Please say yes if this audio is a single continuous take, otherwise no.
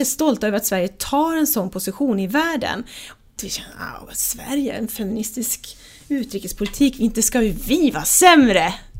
no